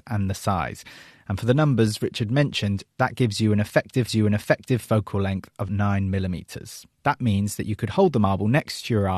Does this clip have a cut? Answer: yes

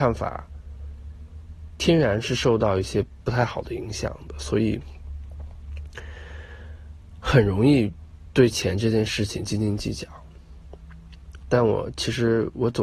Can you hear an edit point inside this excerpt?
yes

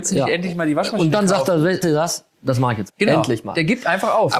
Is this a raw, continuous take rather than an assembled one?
no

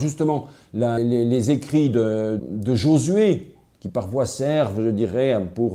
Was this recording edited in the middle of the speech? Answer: yes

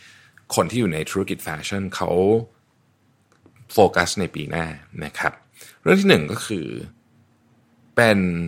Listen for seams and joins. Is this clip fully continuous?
yes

